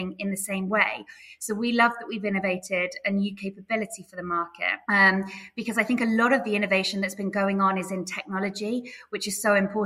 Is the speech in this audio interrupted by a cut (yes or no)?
yes